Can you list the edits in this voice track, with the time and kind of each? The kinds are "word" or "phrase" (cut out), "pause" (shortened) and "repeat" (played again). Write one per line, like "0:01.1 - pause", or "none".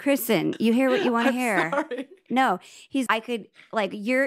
0:03.1 - word